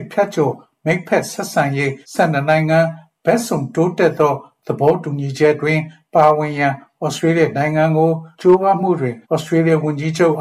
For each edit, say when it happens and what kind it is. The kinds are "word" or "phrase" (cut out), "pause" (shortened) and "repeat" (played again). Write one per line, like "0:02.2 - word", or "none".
0:02.0 - pause
0:08.3 - pause
0:09.2 - pause